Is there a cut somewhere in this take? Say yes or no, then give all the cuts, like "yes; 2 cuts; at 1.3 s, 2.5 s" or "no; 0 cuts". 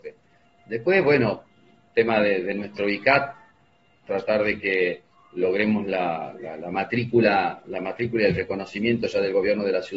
no; 0 cuts